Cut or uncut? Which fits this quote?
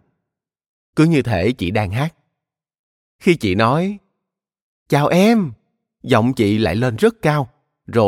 uncut